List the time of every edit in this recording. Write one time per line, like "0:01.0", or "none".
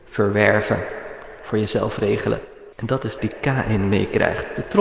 0:02.7
0:03.2